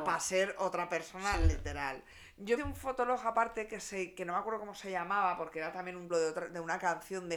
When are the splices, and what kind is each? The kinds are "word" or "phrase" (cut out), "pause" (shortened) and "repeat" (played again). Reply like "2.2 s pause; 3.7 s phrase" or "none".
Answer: 2.6 s word; 6.1 s word